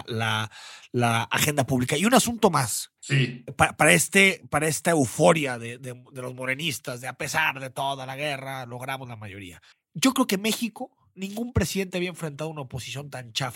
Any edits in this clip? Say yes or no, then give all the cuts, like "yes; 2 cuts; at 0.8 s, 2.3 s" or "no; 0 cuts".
yes; 2 cuts; at 3.0 s, 9.7 s